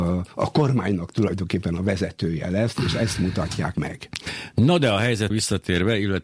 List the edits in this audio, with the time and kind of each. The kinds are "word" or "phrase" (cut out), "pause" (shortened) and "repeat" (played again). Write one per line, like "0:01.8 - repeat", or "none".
0:03.7 - word
0:05.3 - word